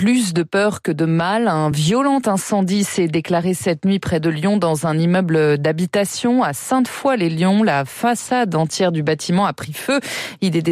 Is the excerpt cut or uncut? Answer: uncut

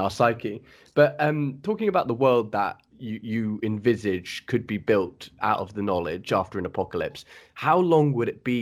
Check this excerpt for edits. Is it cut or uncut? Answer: cut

